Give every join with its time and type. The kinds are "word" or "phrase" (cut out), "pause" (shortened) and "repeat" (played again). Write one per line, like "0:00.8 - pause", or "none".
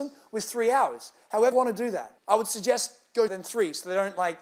0:01.5 - word
0:02.2 - pause
0:03.3 - word